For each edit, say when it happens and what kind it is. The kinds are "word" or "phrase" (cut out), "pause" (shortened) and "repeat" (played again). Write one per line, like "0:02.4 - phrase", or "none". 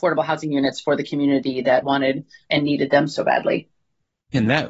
0:01.8 - word